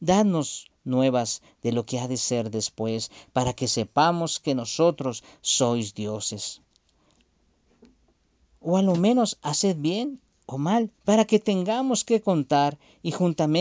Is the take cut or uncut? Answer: cut